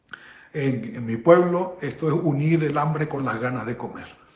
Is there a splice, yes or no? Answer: no